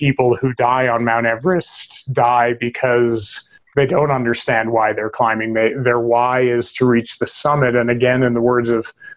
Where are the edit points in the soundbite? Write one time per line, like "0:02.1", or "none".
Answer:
none